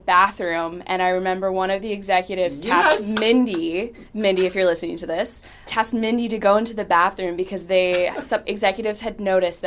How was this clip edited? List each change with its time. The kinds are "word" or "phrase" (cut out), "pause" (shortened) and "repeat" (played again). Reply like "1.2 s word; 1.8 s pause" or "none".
4.1 s pause; 5.7 s word; 8.4 s word